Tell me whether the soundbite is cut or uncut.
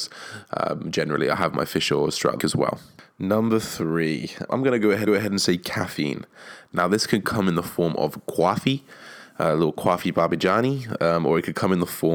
cut